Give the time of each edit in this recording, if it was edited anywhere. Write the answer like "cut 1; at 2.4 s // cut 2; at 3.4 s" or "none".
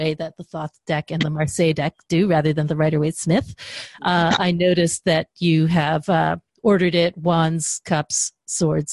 none